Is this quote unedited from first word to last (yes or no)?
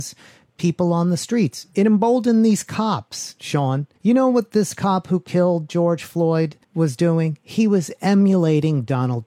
no